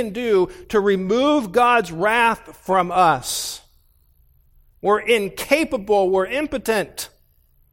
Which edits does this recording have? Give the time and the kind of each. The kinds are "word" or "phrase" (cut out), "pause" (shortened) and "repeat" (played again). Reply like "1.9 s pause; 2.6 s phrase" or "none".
none